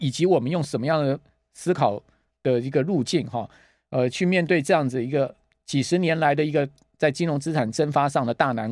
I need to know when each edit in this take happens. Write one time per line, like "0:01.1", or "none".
none